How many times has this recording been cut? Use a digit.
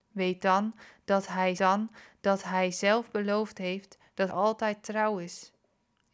2